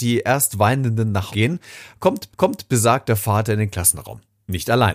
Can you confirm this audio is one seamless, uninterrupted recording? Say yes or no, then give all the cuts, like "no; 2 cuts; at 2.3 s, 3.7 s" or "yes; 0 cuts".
no; 2 cuts; at 1.3 s, 2.3 s